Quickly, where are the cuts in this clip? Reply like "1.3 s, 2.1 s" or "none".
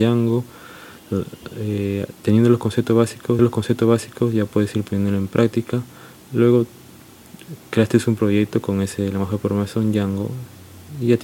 3.4 s